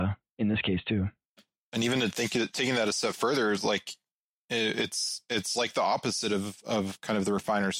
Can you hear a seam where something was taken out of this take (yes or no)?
no